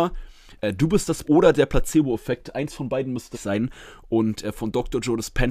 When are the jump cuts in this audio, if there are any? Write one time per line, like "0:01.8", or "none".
0:01.2
0:03.3